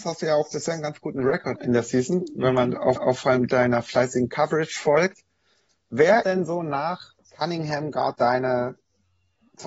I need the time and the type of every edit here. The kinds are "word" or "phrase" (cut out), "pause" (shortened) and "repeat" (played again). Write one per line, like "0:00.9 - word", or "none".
0:01.6 - word
0:03.0 - repeat
0:06.2 - word
0:07.2 - pause
0:08.1 - word